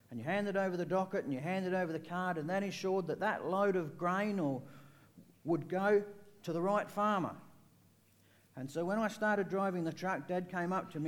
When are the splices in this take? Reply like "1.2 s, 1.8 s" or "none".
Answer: none

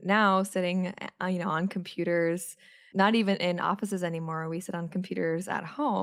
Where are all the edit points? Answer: none

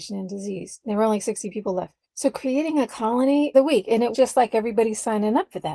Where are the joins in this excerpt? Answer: 2.0 s, 3.5 s, 4.1 s

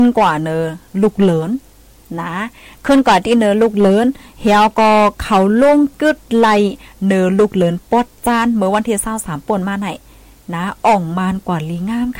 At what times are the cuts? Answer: none

